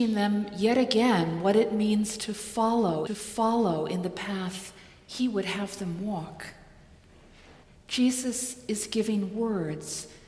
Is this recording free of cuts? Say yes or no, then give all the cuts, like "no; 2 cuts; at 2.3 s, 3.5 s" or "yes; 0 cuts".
no; 2 cuts; at 3.1 s, 7.6 s